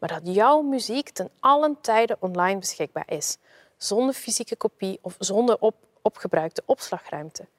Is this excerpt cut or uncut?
uncut